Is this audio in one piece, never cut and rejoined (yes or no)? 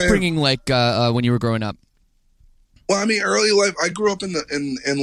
yes